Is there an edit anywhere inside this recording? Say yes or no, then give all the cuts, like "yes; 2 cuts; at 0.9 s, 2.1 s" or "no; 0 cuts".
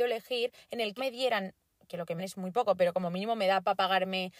yes; 2 cuts; at 1.0 s, 2.2 s